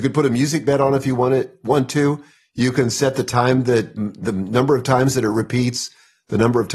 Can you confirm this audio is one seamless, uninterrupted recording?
no; 1 cut; at 4.0 s

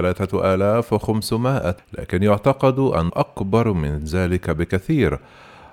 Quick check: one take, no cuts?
no; 2 cuts; at 1.8 s, 3.1 s

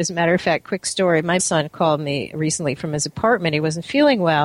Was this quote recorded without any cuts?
no; 1 cut; at 1.4 s

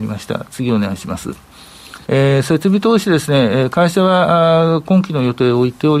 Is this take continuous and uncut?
no; 1 cut; at 2.0 s

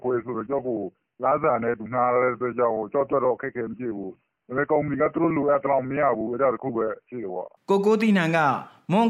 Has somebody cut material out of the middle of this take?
no; 0 cuts

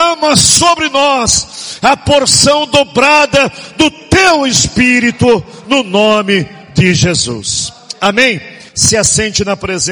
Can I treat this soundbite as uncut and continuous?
no; 1 cut; at 8.7 s

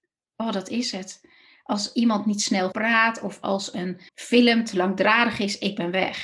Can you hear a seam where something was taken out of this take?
yes; 2 cuts; at 2.7 s, 4.1 s

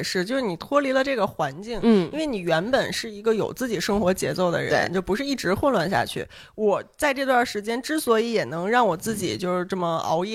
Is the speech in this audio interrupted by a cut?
no; 0 cuts

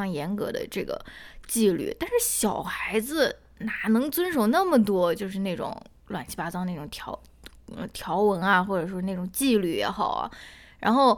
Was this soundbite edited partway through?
no; 0 cuts

